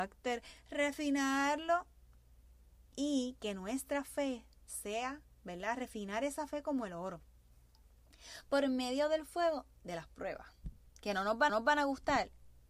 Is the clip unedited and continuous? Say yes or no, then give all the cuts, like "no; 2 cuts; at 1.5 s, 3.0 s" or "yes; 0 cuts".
no; 2 cuts; at 2.9 s, 11.5 s